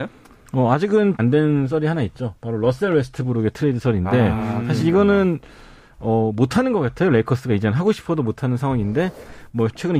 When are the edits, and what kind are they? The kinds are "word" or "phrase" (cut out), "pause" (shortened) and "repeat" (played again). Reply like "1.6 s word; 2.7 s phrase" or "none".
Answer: 1.2 s word